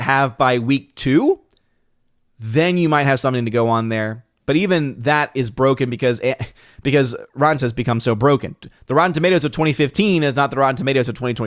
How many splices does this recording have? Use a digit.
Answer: 1